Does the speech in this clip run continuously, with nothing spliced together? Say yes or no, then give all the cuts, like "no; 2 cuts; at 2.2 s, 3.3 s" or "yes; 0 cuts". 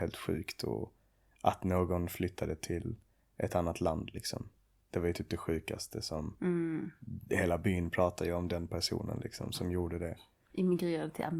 yes; 0 cuts